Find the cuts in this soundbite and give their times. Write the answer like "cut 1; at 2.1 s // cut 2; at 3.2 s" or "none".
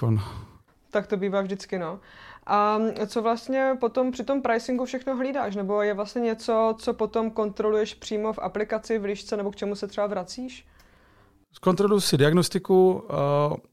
none